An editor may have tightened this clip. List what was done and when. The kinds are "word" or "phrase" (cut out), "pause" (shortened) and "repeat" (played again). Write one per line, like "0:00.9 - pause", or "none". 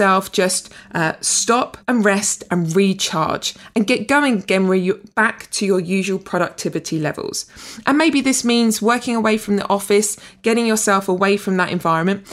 0:01.8 - pause